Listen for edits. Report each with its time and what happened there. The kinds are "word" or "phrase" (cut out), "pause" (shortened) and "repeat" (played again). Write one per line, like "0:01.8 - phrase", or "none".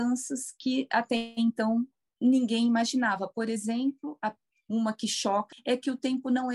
0:05.5 - word